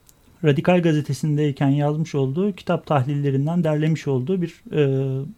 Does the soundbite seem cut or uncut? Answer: uncut